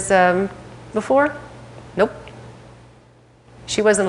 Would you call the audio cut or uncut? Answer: cut